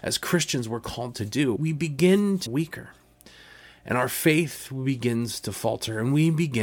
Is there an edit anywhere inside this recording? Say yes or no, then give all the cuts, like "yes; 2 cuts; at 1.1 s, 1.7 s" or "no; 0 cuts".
yes; 2 cuts; at 1.6 s, 2.5 s